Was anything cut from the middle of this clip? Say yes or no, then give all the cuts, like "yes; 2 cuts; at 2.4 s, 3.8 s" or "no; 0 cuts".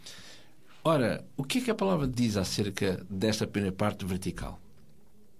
yes; 1 cut; at 2.1 s